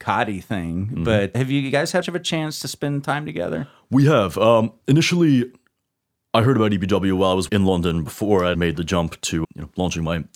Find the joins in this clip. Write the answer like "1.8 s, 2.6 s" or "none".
1.3 s, 2.0 s, 7.5 s, 8.5 s, 9.4 s